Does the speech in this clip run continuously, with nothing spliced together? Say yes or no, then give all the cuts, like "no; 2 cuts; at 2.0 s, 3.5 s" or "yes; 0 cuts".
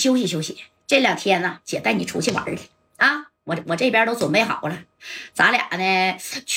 no; 1 cut; at 3.4 s